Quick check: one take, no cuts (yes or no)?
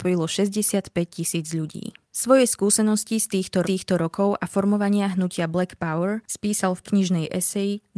no